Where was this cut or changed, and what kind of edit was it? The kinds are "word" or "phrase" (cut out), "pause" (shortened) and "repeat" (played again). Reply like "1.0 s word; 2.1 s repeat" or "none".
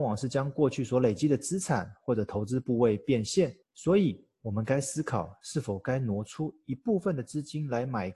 3.6 s pause